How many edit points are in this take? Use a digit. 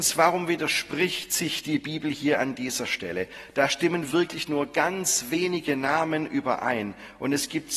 0